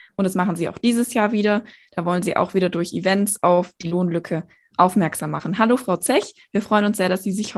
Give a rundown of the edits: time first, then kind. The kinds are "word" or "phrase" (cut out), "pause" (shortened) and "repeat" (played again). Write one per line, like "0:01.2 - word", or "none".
none